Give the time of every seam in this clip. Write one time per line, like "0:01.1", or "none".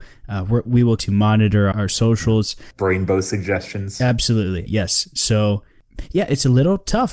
0:01.0
0:01.7
0:04.7